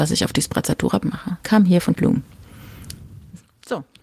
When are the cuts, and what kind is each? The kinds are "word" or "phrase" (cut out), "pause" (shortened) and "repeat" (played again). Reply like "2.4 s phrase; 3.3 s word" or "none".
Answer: 1.0 s phrase; 1.4 s pause; 1.9 s word